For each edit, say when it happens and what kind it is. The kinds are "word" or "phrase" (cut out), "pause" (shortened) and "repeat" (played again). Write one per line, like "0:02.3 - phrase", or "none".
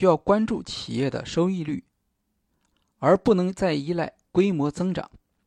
none